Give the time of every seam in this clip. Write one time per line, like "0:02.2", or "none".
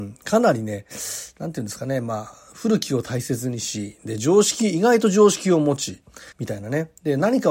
0:06.3